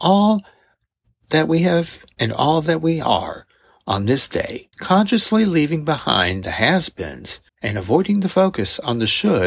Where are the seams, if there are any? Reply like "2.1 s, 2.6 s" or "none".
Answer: 2.1 s, 4.7 s, 7.5 s